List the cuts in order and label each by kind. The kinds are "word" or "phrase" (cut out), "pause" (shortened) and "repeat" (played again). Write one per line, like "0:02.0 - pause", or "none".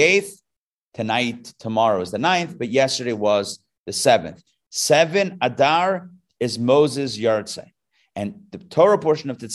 none